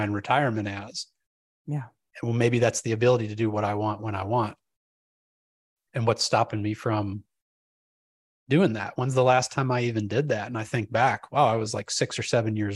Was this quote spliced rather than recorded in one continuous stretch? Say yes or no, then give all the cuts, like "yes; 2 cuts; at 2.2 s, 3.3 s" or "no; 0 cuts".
no; 0 cuts